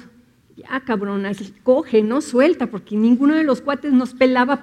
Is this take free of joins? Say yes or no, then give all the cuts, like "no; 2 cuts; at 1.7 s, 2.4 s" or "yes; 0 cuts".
yes; 0 cuts